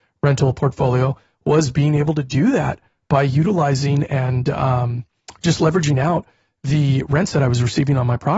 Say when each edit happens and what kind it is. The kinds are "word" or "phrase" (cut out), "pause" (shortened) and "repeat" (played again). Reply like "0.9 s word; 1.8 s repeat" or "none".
none